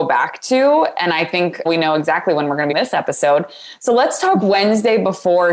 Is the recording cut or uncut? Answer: cut